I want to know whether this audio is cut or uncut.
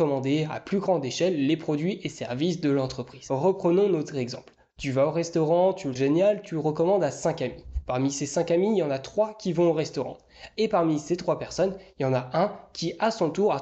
cut